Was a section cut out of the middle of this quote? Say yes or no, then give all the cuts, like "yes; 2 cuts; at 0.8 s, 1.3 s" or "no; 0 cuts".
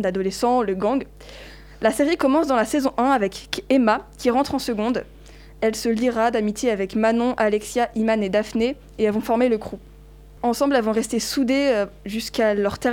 no; 0 cuts